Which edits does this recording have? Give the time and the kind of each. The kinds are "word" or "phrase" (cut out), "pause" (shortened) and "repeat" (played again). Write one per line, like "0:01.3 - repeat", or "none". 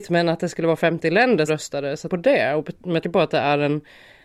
0:01.5 - word
0:02.1 - phrase
0:03.0 - word

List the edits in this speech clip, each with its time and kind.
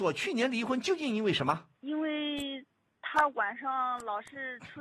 0:01.7 - pause

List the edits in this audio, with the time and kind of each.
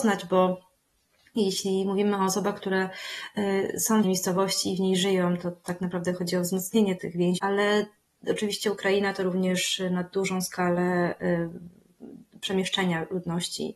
0:04.0 - phrase
0:07.0 - word
0:07.4 - word

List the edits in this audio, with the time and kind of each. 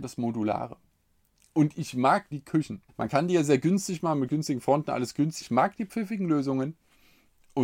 0:02.3 - word
0:02.9 - pause
0:05.4 - word

